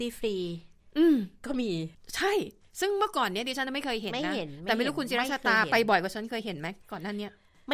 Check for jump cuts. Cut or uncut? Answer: uncut